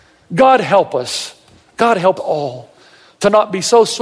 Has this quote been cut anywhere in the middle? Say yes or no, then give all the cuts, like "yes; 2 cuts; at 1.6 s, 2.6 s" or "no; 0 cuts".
yes; 1 cut; at 2.2 s